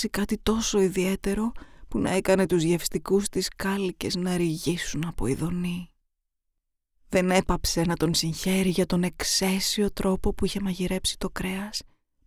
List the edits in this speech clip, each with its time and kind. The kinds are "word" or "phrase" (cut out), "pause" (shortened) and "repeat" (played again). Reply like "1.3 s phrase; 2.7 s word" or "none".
none